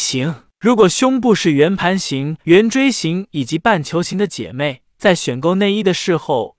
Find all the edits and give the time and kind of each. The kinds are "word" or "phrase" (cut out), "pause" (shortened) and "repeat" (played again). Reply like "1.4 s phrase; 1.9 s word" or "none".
2.4 s pause